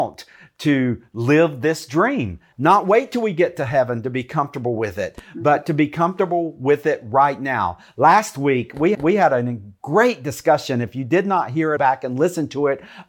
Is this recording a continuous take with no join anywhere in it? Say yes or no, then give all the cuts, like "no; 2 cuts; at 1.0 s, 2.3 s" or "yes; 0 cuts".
no; 3 cuts; at 2.5 s, 8.9 s, 11.8 s